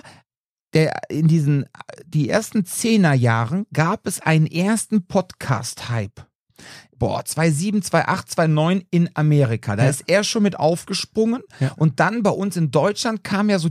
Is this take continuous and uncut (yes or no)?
yes